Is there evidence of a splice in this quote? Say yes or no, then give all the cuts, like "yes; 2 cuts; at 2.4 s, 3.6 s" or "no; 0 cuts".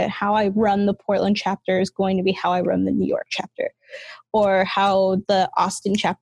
no; 0 cuts